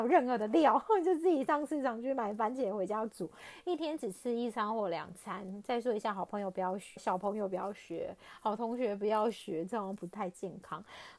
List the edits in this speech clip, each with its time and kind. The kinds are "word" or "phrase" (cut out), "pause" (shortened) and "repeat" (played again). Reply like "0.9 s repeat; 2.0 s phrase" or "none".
7.0 s word